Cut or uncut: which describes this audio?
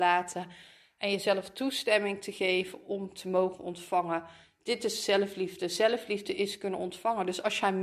uncut